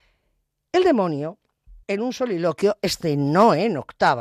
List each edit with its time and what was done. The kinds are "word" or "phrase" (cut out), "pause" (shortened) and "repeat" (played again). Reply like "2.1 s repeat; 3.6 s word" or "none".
1.8 s pause